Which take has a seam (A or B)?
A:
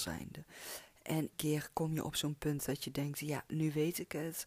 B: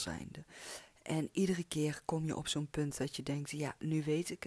A